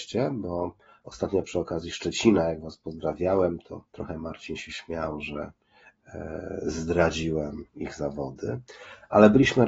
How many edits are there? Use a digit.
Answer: 2